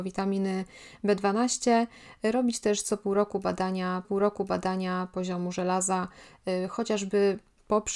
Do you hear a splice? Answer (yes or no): yes